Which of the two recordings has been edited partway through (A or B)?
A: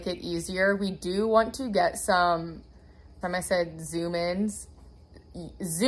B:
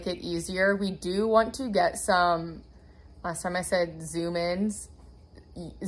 A